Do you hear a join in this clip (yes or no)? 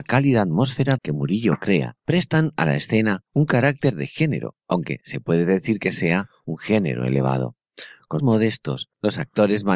yes